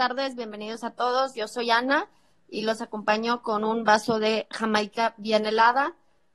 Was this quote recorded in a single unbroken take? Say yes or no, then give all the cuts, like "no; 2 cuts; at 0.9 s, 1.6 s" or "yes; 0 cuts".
yes; 0 cuts